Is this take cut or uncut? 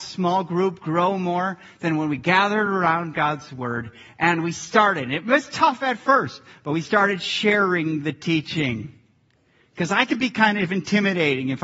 uncut